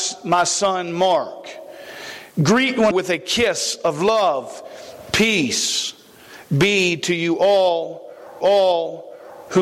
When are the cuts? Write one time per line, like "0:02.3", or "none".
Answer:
0:02.3
0:02.9
0:08.4